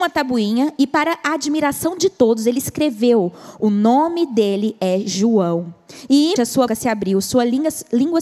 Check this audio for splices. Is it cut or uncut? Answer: cut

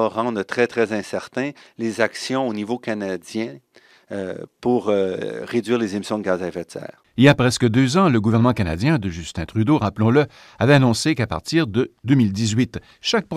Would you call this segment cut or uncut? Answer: uncut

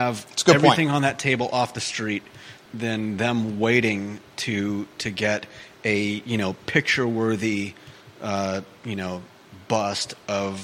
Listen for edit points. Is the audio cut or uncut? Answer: cut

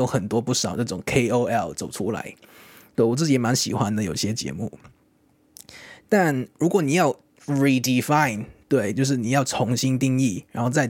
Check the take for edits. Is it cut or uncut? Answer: uncut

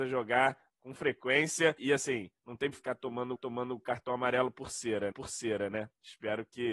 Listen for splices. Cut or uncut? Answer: cut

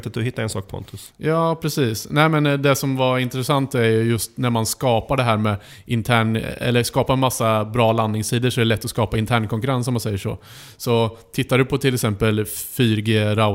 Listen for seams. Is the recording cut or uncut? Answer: uncut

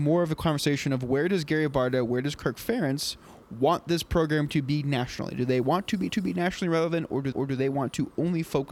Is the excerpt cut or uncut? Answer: cut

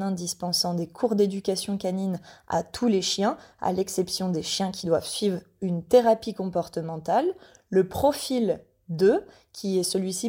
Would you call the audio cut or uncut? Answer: uncut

